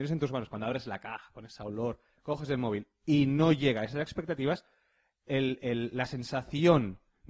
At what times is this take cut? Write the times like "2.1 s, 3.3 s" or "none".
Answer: none